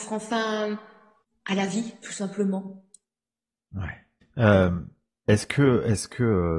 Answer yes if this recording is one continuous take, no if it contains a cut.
yes